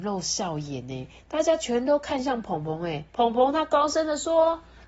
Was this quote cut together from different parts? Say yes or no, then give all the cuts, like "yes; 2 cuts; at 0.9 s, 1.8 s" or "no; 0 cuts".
yes; 1 cut; at 3.1 s